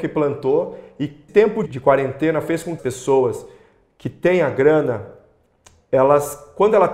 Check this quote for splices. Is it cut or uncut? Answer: cut